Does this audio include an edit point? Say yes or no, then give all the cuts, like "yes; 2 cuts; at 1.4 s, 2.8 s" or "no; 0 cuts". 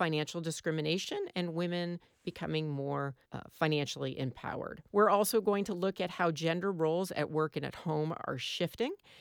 yes; 2 cuts; at 3.2 s, 4.9 s